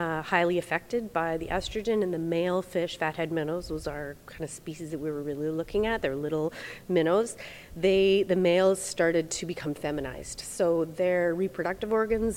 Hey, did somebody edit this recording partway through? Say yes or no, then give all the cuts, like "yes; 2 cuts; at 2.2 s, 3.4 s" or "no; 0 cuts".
no; 0 cuts